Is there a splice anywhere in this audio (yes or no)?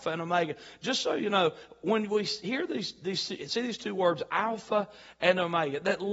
no